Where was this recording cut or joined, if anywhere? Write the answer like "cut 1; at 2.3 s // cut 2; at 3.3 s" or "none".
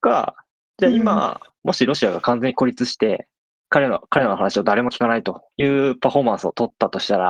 cut 1; at 3.4 s // cut 2; at 5.5 s